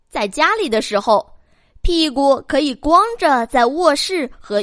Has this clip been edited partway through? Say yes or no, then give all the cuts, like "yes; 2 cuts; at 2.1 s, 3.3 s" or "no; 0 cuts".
no; 0 cuts